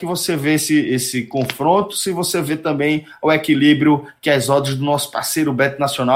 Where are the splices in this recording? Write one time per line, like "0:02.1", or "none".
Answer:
none